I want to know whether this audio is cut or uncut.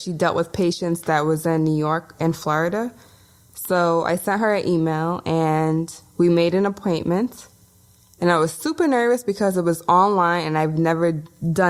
uncut